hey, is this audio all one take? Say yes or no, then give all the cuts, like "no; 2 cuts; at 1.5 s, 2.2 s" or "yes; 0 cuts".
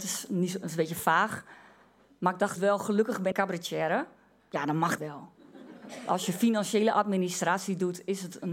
no; 3 cuts; at 2.6 s, 3.3 s, 5.0 s